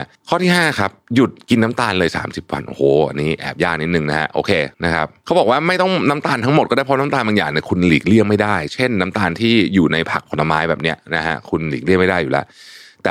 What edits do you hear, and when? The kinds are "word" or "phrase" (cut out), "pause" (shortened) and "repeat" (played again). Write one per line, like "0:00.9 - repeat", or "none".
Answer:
0:04.7 - pause